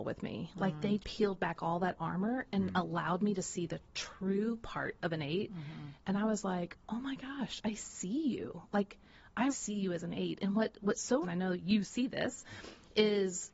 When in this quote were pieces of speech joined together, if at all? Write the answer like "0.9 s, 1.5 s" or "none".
1.0 s, 6.8 s, 9.5 s, 11.2 s

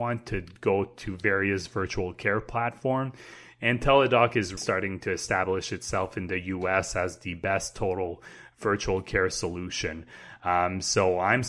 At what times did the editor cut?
4.6 s

